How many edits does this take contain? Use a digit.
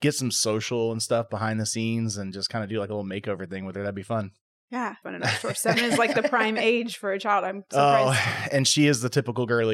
1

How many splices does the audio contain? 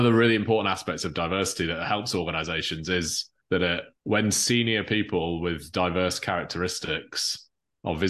2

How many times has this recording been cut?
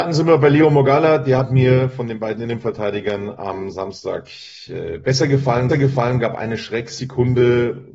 1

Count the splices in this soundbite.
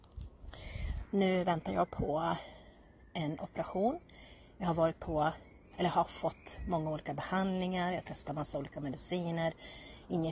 0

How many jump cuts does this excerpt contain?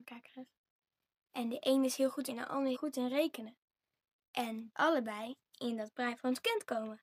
3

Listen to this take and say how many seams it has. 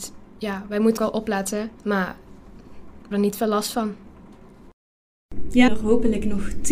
4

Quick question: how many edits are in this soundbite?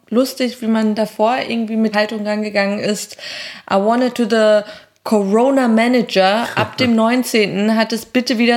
2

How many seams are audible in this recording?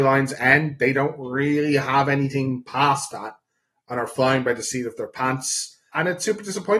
0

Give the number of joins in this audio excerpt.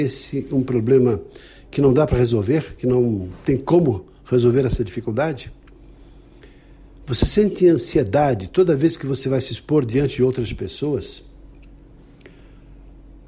0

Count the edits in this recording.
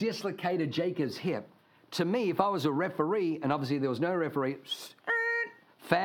0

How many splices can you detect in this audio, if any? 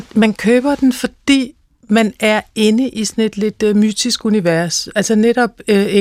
0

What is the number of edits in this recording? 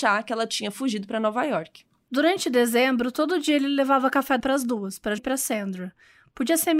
2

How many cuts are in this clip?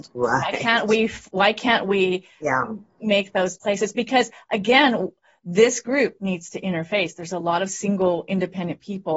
0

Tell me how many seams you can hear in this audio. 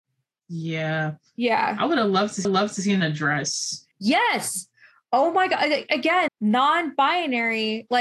3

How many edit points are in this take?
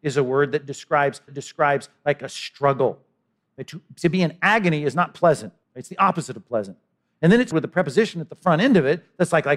3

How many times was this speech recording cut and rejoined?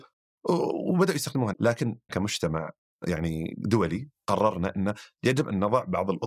2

